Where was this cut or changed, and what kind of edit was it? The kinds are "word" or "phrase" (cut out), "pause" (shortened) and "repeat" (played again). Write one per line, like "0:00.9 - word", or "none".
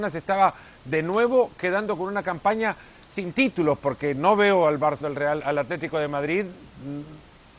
0:05.0 - word